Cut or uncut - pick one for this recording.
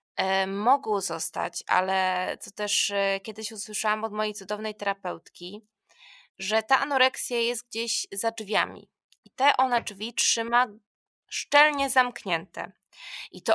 uncut